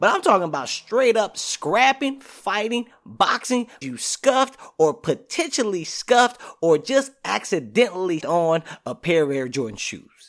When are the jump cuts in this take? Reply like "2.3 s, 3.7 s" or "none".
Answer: 3.8 s, 8.2 s